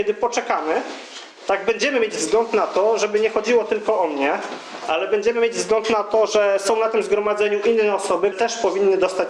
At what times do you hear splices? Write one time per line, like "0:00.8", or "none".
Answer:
0:01.4
0:08.3